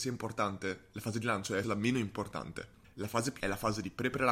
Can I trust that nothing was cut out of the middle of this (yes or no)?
no